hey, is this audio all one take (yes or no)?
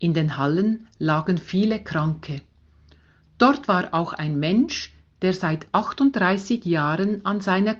yes